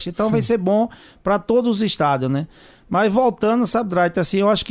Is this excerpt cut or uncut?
uncut